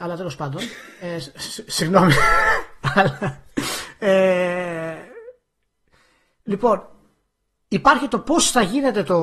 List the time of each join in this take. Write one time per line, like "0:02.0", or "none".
none